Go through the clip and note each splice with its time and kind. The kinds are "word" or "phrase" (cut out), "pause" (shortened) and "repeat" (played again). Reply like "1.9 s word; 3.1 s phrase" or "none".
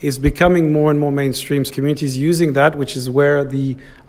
1.7 s phrase